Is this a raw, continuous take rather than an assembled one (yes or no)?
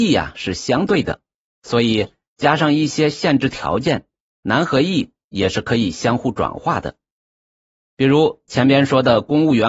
yes